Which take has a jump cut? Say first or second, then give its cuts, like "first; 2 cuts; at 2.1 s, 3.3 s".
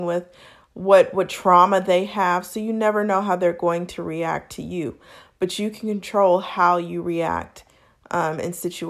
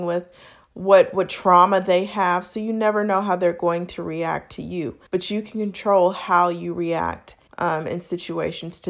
second; 2 cuts; at 5.1 s, 7.5 s